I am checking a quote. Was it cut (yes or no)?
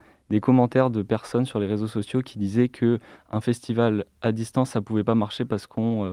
no